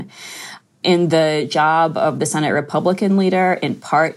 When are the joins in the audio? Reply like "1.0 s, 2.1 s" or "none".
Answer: none